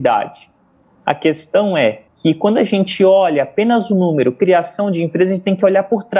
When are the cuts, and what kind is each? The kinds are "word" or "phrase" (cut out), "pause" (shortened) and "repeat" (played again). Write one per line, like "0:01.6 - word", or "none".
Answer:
0:02.1 - pause